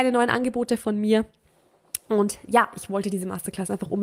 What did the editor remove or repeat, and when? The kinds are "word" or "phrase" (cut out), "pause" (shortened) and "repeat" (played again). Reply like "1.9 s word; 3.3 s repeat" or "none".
none